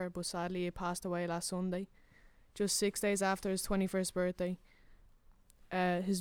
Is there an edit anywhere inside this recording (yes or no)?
no